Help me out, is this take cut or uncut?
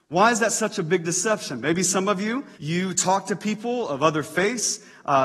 cut